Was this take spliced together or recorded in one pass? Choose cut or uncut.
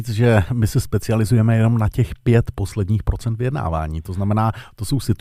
uncut